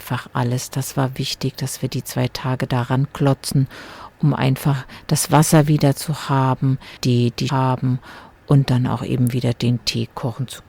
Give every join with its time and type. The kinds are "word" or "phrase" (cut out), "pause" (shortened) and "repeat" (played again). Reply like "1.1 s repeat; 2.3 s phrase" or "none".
7.0 s pause; 7.5 s phrase